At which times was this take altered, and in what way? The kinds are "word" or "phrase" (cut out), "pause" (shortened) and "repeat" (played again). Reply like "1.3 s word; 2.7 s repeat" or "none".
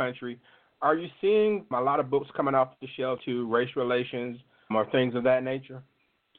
1.7 s word; 3.2 s phrase; 4.7 s word

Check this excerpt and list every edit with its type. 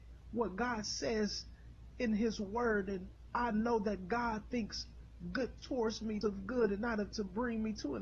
5.6 s word; 6.2 s word; 7.1 s word

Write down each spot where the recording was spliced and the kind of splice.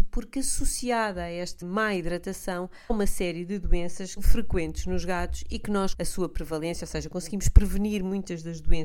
1.6 s word; 2.9 s word; 4.2 s word; 5.9 s phrase

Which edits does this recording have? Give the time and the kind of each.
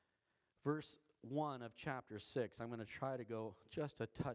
none

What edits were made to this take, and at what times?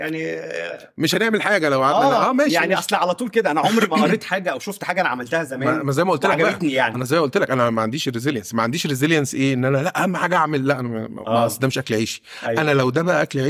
none

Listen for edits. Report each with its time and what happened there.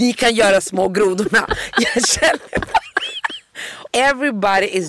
3.9 s word

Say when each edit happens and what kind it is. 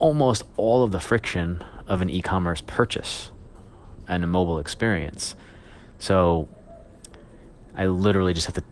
none

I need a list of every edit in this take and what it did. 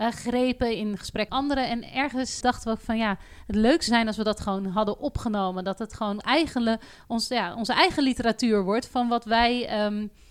1.3 s word; 2.4 s word; 3.9 s word; 6.2 s word

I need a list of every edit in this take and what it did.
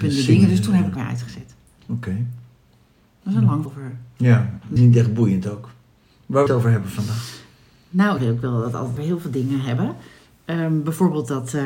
1.0 s word; 3.7 s word; 4.8 s word; 6.5 s word; 8.2 s word; 9.0 s word

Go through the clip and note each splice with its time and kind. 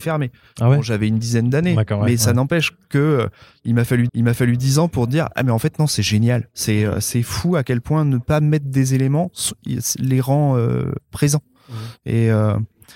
4.1 s repeat

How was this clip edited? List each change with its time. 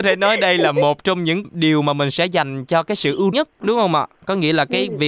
1.4 s word; 3.3 s word

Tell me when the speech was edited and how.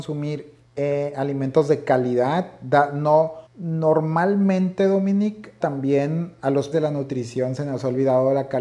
3.5 s pause; 5.6 s word; 6.7 s word

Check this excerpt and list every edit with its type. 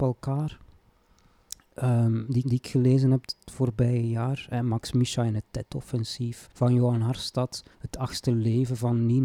2.4 s repeat; 6.5 s pause; 7.7 s pause

